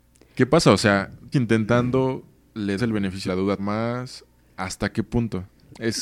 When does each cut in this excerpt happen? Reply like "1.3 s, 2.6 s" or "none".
1.3 s, 2.8 s, 3.3 s, 3.6 s